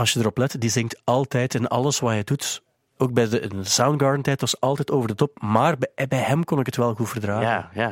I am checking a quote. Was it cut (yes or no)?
no